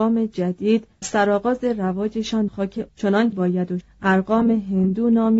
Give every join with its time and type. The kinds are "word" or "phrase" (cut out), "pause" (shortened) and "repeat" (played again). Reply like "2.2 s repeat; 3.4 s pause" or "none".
1.0 s word; 2.5 s word; 2.9 s word; 3.3 s word; 3.8 s word

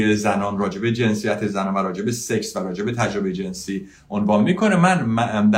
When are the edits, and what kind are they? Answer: none

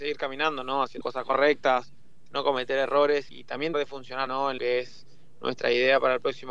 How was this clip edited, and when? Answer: 1.0 s word; 3.3 s word; 3.7 s word; 4.3 s word; 4.6 s word

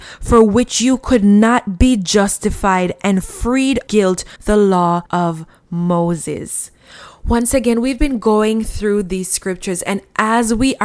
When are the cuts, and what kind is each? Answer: 3.9 s word; 4.4 s word; 5.1 s pause; 8.0 s word

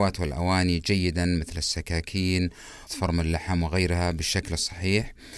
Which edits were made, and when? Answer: 2.9 s word

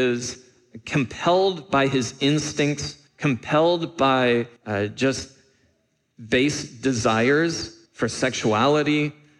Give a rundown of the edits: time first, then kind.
3.1 s pause; 4.6 s pause; 7.9 s pause

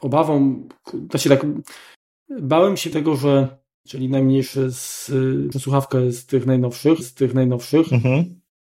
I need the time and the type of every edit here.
2.9 s phrase; 3.9 s phrase; 5.5 s word; 7.0 s repeat

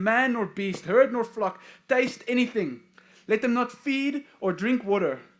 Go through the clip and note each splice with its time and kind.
none

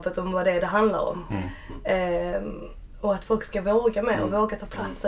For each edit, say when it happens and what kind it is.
none

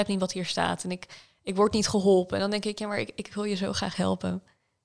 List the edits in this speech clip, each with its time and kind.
none

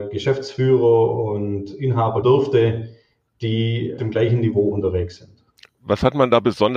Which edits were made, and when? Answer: 2.2 s word; 4.0 s word

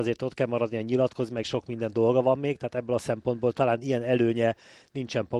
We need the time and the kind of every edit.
1.4 s word

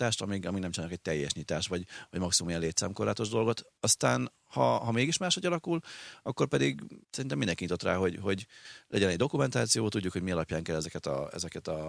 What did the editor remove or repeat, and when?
3.8 s pause; 7.0 s pause

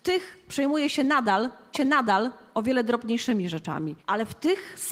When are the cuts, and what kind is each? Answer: 1.7 s repeat; 4.0 s pause

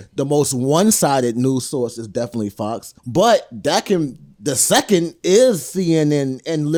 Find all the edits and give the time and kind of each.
3.0 s pause

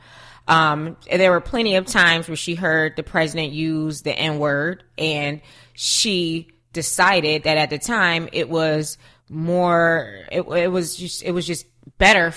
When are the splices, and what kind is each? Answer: none

